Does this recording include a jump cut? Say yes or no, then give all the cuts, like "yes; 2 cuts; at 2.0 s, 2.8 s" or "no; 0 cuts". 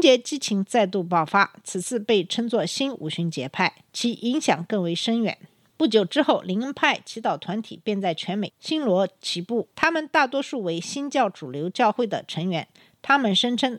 yes; 2 cuts; at 3.8 s, 9.7 s